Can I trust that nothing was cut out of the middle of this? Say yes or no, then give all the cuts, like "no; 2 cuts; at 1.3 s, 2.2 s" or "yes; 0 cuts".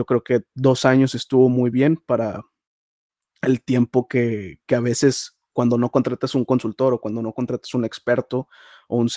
yes; 0 cuts